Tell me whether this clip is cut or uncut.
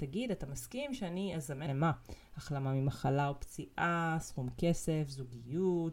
cut